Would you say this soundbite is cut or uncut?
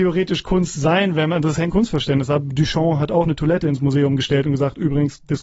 cut